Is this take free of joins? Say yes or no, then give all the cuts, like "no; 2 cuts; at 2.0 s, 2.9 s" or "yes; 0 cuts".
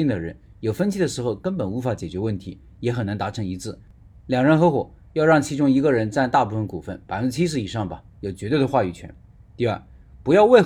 yes; 0 cuts